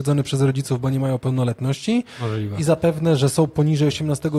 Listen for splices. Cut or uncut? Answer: uncut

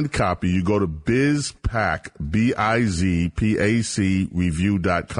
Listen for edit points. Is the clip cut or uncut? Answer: uncut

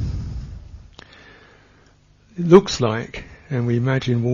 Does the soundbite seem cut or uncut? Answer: uncut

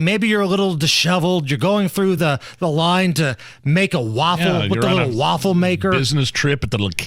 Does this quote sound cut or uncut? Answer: uncut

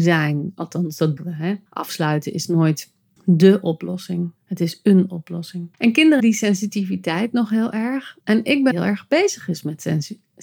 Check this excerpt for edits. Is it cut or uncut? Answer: cut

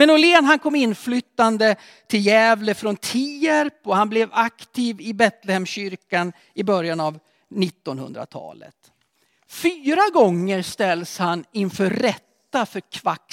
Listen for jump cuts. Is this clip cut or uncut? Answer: uncut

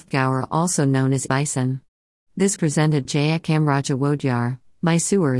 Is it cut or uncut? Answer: cut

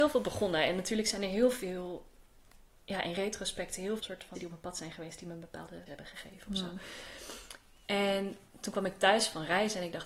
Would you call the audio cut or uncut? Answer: cut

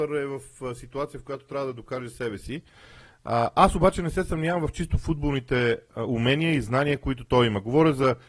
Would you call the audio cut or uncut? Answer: uncut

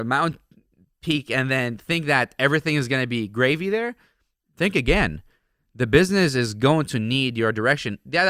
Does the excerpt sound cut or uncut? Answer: uncut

